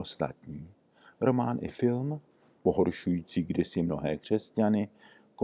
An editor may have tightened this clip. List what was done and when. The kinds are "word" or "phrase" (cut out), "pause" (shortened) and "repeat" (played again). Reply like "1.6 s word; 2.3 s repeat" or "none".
none